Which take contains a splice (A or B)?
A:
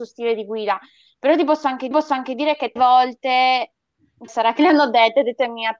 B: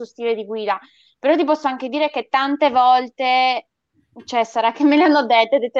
A